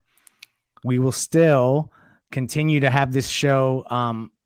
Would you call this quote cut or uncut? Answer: uncut